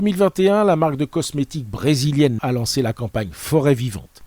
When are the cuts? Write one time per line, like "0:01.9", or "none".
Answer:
0:02.4